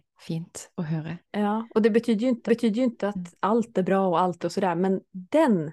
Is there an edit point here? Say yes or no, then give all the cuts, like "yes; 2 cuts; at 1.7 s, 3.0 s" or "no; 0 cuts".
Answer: yes; 3 cuts; at 1.2 s, 2.5 s, 4.4 s